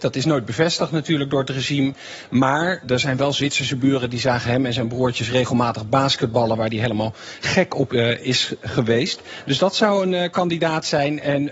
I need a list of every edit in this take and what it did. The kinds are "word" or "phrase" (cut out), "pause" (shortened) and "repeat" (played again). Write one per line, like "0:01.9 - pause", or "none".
0:02.8 - word